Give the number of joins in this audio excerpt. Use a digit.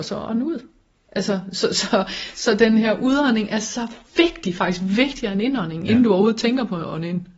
0